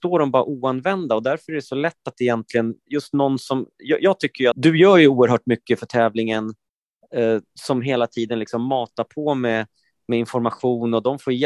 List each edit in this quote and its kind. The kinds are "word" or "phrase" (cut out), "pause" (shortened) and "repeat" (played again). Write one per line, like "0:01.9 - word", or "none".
0:04.5 - word